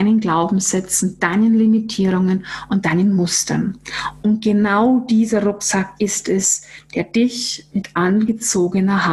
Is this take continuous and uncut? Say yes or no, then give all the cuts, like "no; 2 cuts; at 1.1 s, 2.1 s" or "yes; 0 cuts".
yes; 0 cuts